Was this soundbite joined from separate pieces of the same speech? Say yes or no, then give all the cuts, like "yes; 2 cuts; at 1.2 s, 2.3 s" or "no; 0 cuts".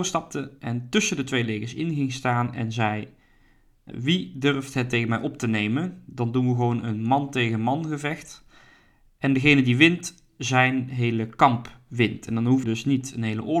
yes; 2 cuts; at 3.9 s, 12.6 s